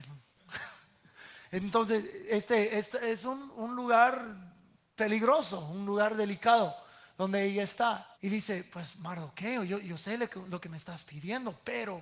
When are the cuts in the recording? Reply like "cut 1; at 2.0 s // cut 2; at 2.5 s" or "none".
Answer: cut 1; at 8.1 s